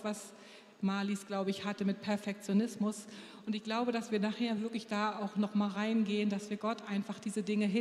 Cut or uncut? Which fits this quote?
uncut